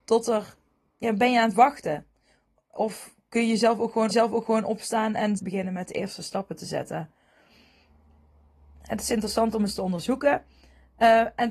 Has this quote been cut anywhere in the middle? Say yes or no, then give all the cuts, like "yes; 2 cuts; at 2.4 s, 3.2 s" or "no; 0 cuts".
yes; 2 cuts; at 4.1 s, 5.4 s